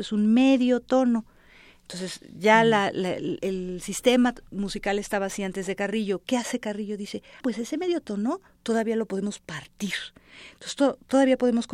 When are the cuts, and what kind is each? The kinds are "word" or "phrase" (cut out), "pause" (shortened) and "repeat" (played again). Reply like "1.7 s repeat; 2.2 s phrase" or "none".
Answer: 3.4 s word; 7.4 s word